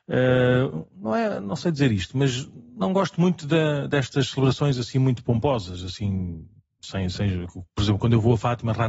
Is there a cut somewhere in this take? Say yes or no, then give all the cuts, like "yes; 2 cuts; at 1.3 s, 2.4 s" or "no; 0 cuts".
no; 0 cuts